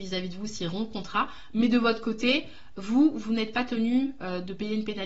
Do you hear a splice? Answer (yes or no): no